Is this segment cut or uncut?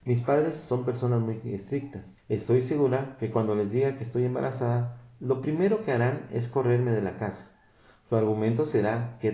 cut